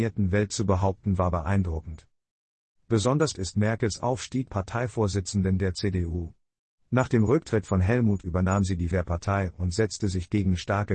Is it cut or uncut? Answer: cut